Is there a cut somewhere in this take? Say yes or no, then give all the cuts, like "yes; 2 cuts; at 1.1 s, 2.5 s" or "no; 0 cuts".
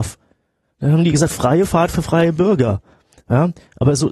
no; 0 cuts